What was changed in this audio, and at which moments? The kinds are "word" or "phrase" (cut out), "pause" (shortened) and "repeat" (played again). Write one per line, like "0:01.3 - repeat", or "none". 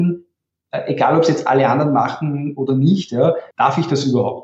0:03.5 - pause